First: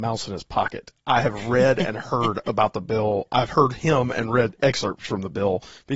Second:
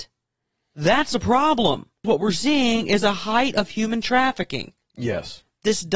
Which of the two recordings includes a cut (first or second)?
second